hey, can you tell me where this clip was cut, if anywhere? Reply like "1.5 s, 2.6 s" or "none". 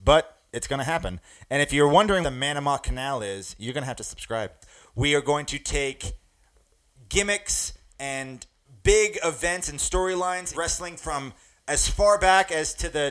2.2 s, 10.5 s

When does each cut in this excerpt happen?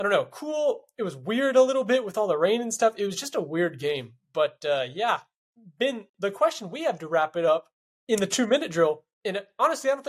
5.4 s, 7.9 s, 9.1 s

